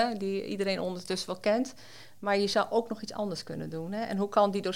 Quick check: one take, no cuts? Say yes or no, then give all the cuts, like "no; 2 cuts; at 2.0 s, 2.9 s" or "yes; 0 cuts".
yes; 0 cuts